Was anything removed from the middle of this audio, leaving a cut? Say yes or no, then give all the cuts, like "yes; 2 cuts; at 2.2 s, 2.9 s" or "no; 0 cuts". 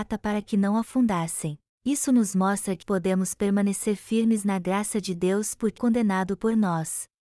yes; 3 cuts; at 1.7 s, 2.8 s, 5.8 s